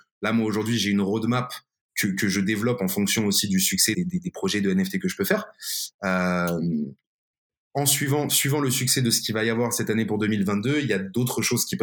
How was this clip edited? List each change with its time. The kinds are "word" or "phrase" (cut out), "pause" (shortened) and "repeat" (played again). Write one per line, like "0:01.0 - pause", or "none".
0:02.0 - word
0:03.9 - word